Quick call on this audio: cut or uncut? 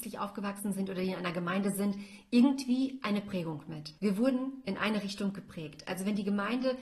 cut